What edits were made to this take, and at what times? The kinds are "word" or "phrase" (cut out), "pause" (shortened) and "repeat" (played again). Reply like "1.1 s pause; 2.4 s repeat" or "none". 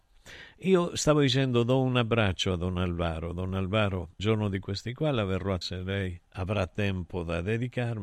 4.2 s word; 5.6 s word; 6.2 s pause